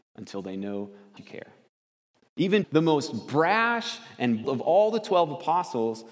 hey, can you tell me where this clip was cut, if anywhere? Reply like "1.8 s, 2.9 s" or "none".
1.2 s, 2.6 s, 4.4 s